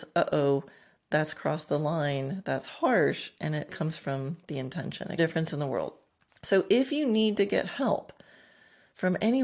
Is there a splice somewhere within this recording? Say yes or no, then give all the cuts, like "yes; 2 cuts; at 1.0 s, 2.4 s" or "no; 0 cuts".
yes; 3 cuts; at 3.7 s, 5.2 s, 6.1 s